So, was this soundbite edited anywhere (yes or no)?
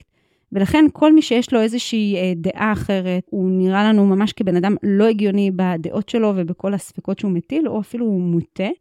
no